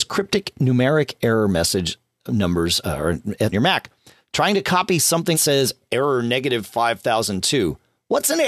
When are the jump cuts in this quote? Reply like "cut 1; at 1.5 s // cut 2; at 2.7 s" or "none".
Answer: cut 1; at 3.5 s // cut 2; at 5.3 s